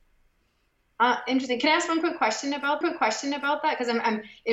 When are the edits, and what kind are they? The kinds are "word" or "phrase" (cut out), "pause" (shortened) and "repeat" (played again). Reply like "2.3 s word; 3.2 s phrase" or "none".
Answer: 2.8 s repeat